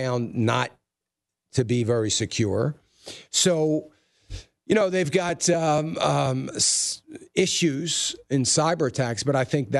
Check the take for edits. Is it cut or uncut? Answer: uncut